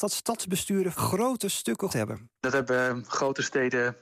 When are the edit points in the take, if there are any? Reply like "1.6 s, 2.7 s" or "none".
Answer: 0.9 s, 1.9 s, 2.4 s